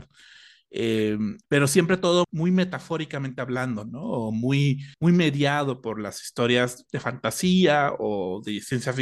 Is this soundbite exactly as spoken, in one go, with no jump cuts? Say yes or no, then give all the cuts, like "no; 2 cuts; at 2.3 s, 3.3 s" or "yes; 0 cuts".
no; 3 cuts; at 1.4 s, 2.2 s, 4.9 s